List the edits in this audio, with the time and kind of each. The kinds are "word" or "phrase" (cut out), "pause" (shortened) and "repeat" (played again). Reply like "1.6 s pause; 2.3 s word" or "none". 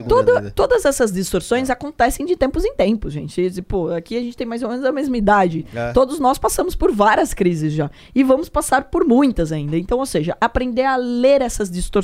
none